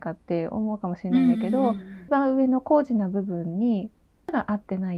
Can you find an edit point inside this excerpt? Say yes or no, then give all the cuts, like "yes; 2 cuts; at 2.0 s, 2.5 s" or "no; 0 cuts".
no; 0 cuts